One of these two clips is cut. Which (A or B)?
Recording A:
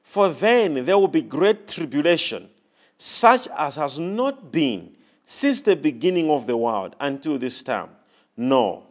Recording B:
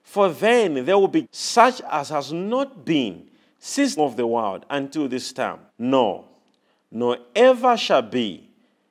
B